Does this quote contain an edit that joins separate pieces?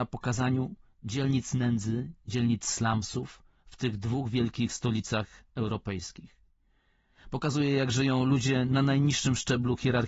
no; 0 cuts

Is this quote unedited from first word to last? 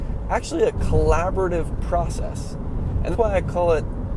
no; 1 cut; at 3.1 s

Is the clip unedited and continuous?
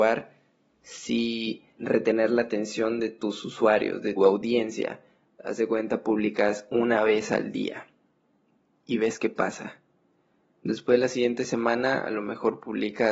no; 2 cuts; at 1.8 s, 4.2 s

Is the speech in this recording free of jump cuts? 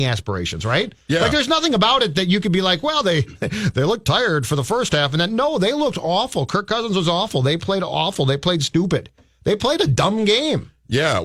yes; 0 cuts

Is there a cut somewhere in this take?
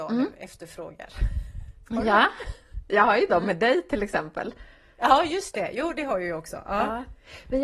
no; 0 cuts

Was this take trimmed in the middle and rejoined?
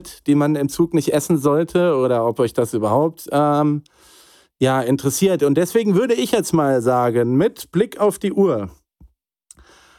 no; 0 cuts

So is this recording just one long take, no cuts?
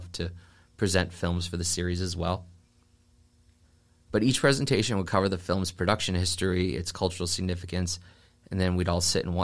yes; 0 cuts

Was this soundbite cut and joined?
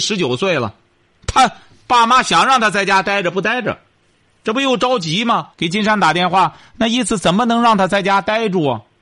yes; 1 cut; at 5.5 s

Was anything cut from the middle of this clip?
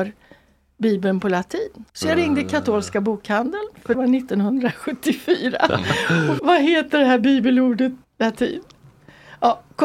yes; 4 cuts; at 1.9 s, 3.9 s, 6.4 s, 8.0 s

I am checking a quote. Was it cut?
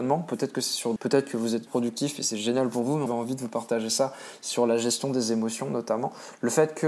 yes; 3 cuts; at 1.0 s, 1.7 s, 3.1 s

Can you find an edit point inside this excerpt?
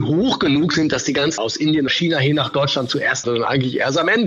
yes; 3 cuts; at 1.4 s, 1.9 s, 3.2 s

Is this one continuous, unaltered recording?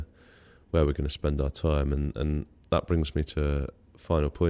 yes; 0 cuts

